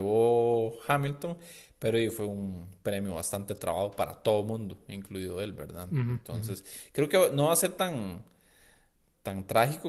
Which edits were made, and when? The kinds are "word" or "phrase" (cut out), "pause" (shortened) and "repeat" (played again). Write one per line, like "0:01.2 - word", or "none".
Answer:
none

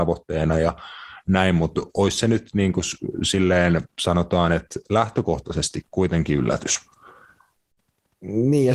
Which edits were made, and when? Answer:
0:05.9 - word

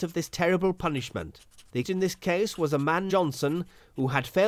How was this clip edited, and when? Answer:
0:01.8 - word
0:03.1 - word

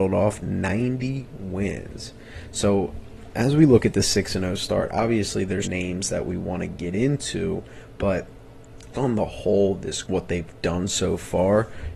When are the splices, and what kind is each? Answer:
0:05.6 - word
0:08.9 - word
0:10.0 - word

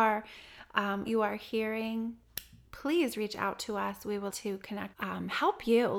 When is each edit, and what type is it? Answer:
0:01.1 - phrase
0:04.3 - word
0:04.9 - phrase

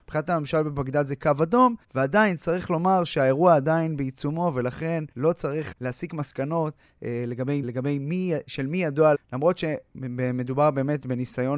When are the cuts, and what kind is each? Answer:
0:01.8 - pause
0:05.1 - pause
0:05.7 - word
0:07.6 - repeat
0:09.1 - word

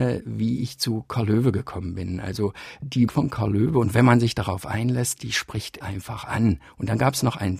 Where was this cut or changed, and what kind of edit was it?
0:03.1 - word
0:05.8 - word

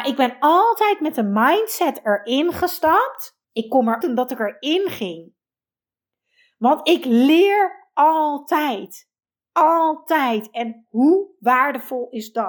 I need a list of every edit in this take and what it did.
0:03.4 - pause
0:04.0 - phrase
0:09.3 - pause

